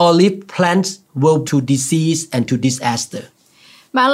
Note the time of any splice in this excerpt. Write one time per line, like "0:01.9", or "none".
0:01.5